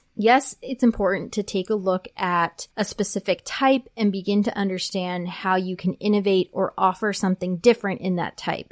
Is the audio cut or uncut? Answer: cut